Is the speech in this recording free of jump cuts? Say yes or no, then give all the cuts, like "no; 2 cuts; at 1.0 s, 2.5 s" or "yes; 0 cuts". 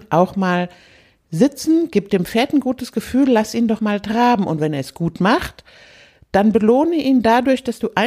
no; 1 cut; at 3.8 s